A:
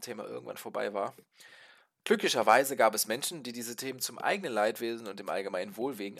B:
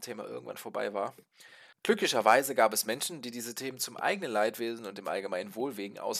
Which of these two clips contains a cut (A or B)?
B